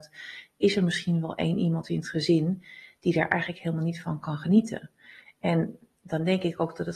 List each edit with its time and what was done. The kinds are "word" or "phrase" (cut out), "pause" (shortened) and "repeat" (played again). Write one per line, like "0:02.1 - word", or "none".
none